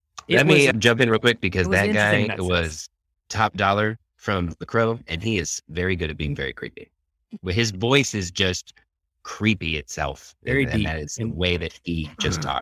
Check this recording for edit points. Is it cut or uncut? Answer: uncut